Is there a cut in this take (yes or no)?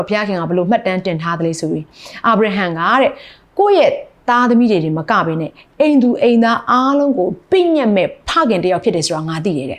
no